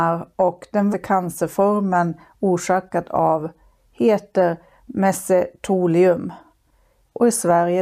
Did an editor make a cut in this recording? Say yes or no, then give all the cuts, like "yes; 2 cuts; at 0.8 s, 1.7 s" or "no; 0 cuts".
yes; 2 cuts; at 0.9 s, 3.8 s